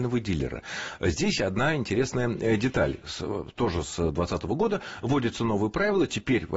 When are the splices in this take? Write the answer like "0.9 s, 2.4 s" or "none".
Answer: 1.4 s